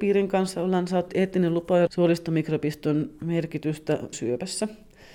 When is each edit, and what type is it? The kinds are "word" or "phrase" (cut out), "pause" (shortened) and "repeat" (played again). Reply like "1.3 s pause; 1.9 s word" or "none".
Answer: 1.1 s word; 1.9 s phrase; 4.1 s word